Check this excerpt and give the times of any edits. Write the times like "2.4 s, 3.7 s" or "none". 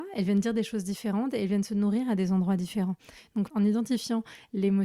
3.5 s